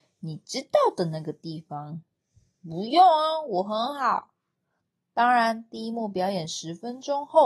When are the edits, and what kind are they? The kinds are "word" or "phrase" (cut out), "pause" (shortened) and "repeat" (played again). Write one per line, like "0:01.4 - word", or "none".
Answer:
none